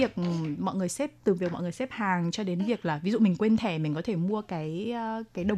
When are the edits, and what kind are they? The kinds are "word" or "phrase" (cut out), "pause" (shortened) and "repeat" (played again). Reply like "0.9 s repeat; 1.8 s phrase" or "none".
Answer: none